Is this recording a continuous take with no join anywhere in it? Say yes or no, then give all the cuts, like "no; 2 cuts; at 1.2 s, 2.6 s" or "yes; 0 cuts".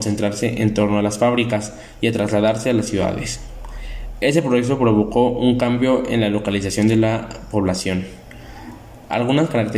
yes; 0 cuts